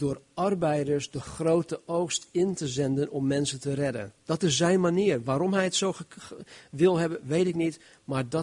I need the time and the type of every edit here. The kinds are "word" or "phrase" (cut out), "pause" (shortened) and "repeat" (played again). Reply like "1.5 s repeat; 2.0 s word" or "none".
4.2 s pause